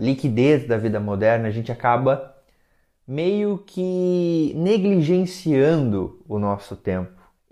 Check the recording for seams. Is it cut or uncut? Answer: uncut